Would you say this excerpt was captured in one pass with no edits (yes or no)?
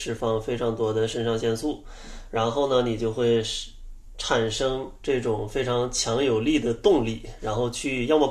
yes